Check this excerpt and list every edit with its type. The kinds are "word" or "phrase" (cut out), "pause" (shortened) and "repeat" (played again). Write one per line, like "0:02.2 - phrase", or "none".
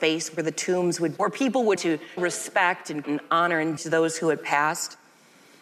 0:01.2 - word
0:01.8 - word
0:02.2 - word
0:03.0 - word
0:03.8 - word

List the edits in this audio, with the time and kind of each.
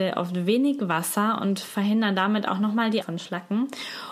0:03.0 - word

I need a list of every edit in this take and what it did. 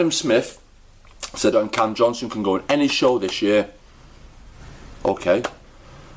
0:01.5 - word

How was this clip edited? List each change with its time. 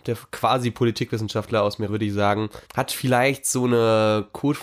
0:01.9 - word
0:02.6 - pause

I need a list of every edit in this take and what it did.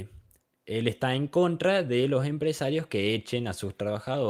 none

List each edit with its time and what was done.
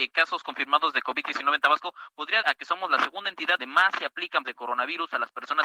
0:02.4 - word
0:03.6 - word
0:04.4 - word

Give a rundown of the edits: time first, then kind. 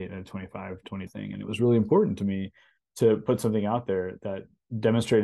0:01.1 - word

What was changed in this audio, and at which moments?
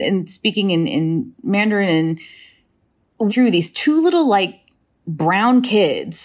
0:03.3 - phrase

